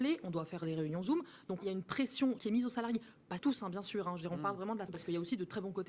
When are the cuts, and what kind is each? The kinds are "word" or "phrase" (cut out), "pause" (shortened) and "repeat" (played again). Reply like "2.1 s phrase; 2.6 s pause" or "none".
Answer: 1.6 s word; 2.4 s word; 3.4 s word; 4.9 s word